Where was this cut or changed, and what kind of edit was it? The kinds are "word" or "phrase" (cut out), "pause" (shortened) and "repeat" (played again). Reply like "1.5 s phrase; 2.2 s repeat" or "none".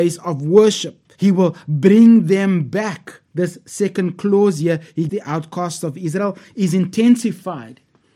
1.2 s pause; 3.3 s pause; 5.1 s word